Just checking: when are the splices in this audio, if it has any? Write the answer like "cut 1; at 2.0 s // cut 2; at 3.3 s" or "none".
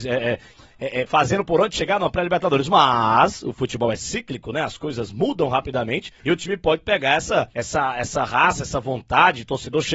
cut 1; at 6.2 s // cut 2; at 7.5 s